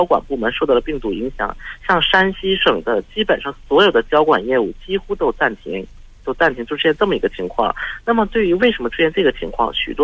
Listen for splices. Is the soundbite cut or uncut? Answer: uncut